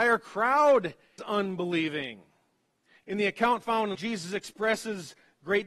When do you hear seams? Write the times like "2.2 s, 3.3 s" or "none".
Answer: 1.2 s, 3.0 s, 3.9 s